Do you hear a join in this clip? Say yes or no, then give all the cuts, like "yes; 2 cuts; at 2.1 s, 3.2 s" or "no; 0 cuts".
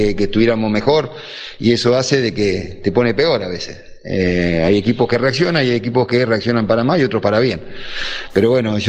no; 0 cuts